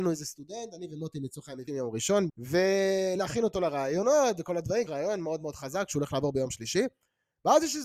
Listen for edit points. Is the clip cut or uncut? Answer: cut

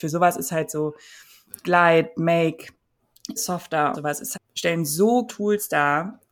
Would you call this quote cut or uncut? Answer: cut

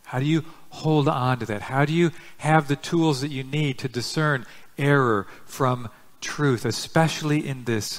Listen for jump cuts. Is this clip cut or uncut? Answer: uncut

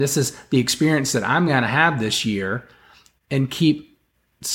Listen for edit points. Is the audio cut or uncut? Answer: uncut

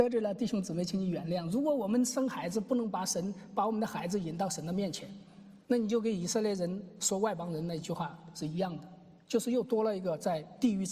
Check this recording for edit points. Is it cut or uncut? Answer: cut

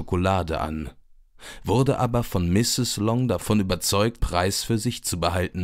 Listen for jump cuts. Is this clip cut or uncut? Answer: cut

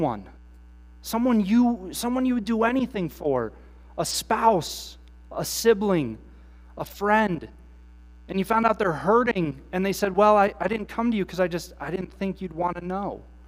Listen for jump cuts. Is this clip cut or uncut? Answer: uncut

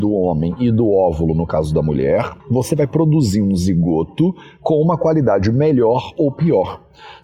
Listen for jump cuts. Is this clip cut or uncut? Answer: cut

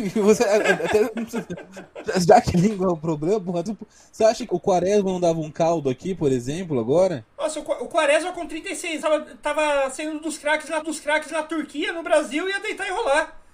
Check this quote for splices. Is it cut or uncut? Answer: cut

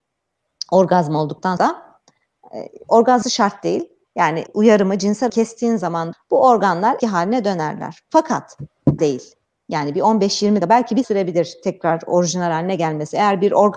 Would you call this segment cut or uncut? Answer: cut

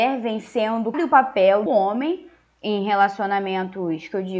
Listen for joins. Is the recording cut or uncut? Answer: cut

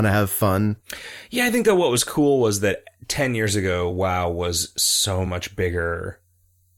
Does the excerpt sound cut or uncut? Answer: uncut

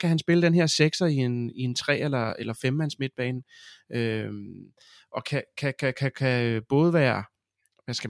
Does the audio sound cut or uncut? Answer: uncut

